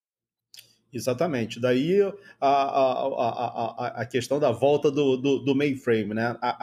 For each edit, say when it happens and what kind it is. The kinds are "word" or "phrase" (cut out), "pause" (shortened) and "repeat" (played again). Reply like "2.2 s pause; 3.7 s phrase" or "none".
none